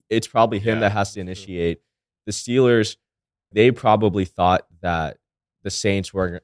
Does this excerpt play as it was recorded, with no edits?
no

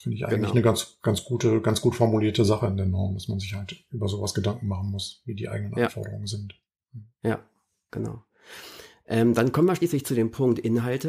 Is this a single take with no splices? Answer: yes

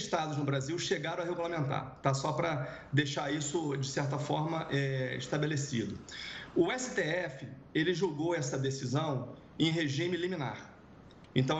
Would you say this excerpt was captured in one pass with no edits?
yes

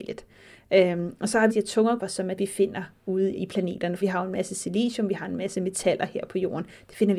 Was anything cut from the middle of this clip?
yes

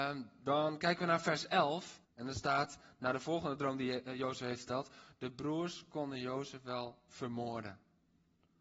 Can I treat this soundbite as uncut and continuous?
no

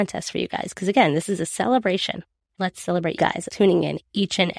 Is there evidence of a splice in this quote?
yes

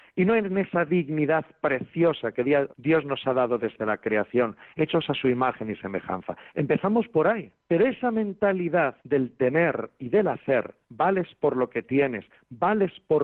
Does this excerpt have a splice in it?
yes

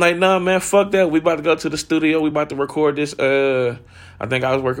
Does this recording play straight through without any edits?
yes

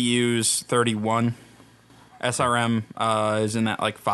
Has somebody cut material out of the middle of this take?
no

